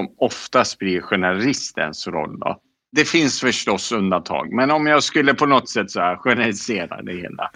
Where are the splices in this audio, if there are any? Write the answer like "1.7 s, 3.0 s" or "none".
none